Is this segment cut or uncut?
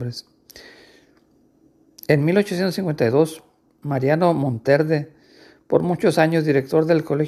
cut